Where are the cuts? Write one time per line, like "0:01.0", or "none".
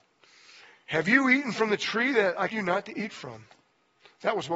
0:02.5